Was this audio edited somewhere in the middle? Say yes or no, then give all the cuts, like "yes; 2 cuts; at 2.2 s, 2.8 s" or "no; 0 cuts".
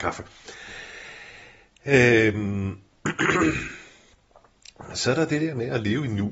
no; 0 cuts